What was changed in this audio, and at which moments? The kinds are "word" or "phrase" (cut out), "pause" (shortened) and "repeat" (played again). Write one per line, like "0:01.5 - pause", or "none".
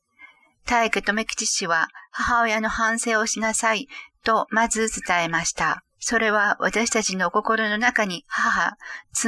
0:05.9 - pause